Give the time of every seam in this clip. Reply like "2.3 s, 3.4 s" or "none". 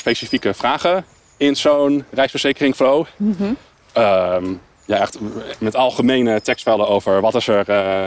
none

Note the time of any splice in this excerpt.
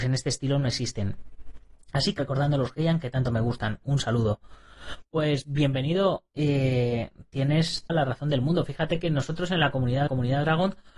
2.2 s, 6.3 s, 7.9 s, 10.1 s

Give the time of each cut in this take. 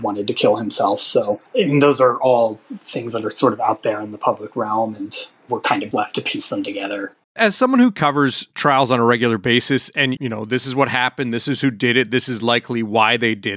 1.5 s, 5.9 s, 7.2 s, 10.2 s

